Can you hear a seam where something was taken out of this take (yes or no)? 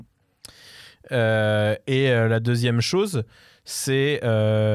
no